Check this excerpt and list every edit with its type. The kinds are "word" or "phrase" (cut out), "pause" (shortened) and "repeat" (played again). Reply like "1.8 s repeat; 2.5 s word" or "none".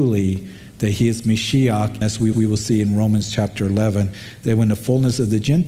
2.0 s word; 2.3 s repeat